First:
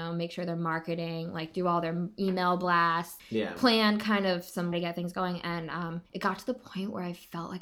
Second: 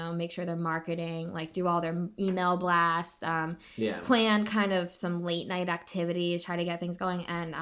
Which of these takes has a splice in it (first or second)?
first